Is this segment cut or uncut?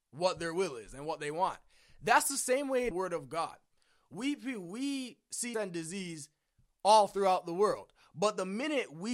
cut